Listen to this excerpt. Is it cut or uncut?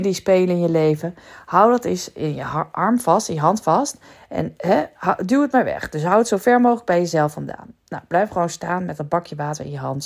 uncut